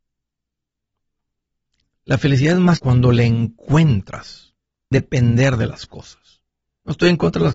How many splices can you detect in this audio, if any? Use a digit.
2